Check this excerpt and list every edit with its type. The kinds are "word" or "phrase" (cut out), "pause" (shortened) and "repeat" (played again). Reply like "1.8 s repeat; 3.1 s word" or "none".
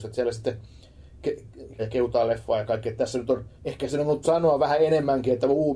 1.8 s phrase; 3.6 s pause; 4.2 s word